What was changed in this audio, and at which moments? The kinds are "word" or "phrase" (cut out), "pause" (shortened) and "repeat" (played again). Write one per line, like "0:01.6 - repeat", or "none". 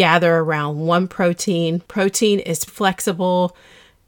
0:01.9 - pause
0:02.7 - word